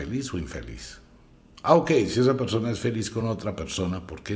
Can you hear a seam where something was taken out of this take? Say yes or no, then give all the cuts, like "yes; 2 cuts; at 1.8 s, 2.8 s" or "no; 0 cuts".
no; 0 cuts